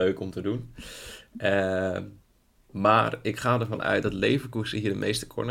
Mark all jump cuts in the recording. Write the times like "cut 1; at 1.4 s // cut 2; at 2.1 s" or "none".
none